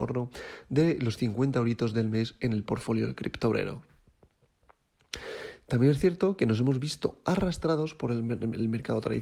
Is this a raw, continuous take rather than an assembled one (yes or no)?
yes